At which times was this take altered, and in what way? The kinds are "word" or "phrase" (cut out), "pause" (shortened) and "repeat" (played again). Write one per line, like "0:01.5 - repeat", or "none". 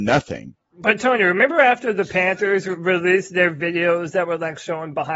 none